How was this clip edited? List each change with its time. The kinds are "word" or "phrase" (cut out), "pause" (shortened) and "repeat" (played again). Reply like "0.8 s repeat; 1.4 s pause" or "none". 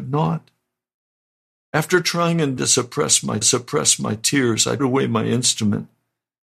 2.6 s word; 3.4 s repeat; 4.8 s word